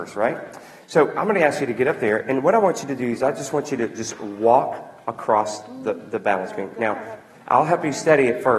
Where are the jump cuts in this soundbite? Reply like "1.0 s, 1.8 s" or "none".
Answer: none